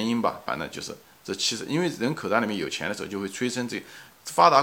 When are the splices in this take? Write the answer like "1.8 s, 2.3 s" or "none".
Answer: none